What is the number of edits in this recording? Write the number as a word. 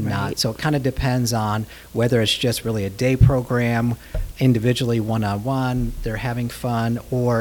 one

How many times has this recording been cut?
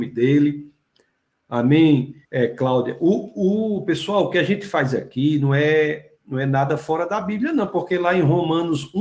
one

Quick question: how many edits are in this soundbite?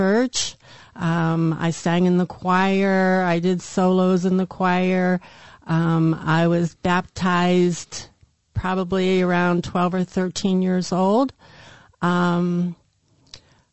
zero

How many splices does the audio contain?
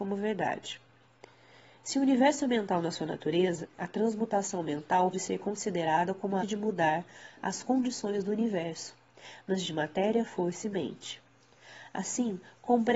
four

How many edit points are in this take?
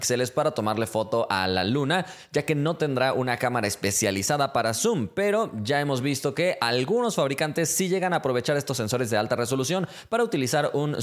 zero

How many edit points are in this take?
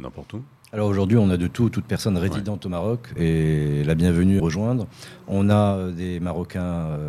two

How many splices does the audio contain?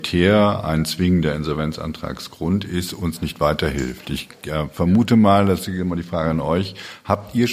zero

